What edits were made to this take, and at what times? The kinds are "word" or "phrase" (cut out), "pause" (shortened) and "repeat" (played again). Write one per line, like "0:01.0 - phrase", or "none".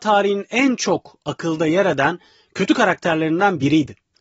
none